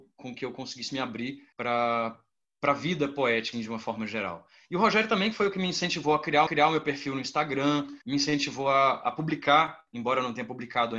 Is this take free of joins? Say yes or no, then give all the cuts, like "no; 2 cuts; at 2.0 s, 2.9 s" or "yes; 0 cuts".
no; 5 cuts; at 1.5 s, 3.5 s, 6.5 s, 8.0 s, 9.9 s